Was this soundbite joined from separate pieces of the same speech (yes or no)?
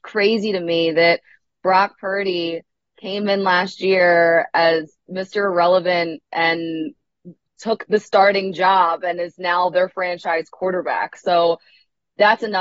no